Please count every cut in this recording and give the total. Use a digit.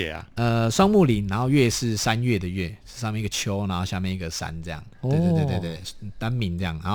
1